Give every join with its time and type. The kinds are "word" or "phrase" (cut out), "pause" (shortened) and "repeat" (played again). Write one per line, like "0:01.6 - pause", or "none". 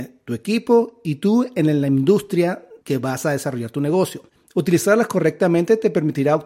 0:02.8 - pause
0:04.3 - pause